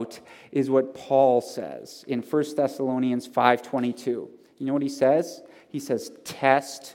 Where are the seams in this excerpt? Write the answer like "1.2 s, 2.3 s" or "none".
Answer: none